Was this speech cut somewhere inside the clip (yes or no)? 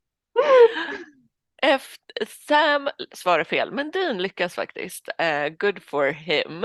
no